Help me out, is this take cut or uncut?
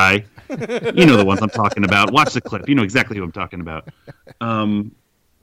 uncut